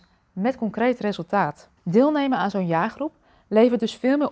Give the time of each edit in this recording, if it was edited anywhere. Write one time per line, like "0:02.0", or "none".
0:01.8